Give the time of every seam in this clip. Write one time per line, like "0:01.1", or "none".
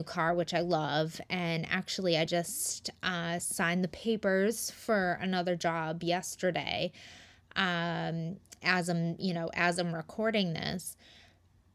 none

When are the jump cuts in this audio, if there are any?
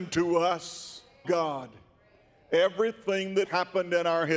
0:01.2
0:03.4

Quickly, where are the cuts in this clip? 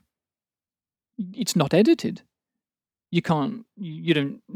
none

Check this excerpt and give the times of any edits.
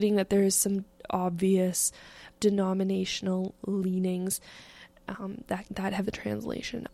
0:00.9
0:02.4
0:05.6
0:06.0

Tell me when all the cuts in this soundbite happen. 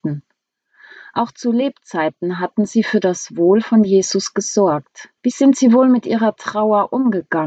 0:05.2

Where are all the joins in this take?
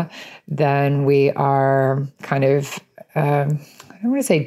0:02.1

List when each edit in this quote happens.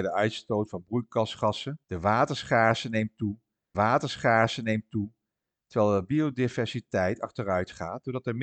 0:01.8
0:03.7

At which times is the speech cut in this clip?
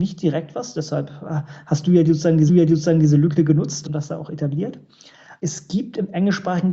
0:02.5
0:03.8
0:05.4

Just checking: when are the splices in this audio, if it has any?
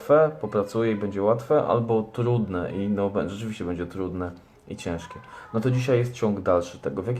none

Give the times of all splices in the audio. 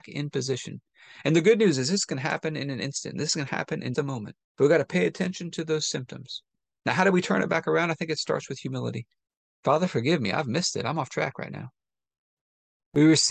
0:03.9
0:04.4
0:09.3

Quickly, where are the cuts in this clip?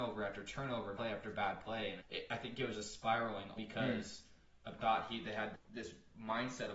0:01.0
0:02.0
0:02.7
0:03.6
0:04.8
0:05.5

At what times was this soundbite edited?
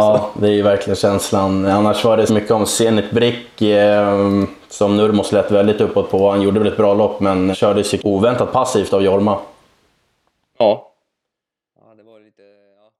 0:02.3
0:07.5
0:08.0

